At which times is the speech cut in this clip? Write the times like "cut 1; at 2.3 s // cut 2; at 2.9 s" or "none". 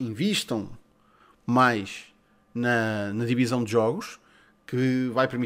none